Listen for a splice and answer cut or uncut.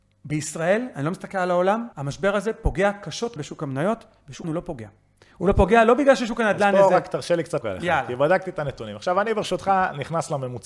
cut